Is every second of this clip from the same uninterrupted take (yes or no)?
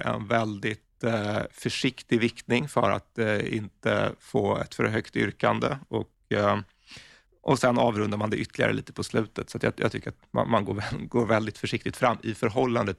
yes